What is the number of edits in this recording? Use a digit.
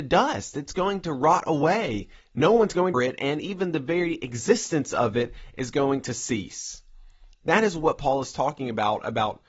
1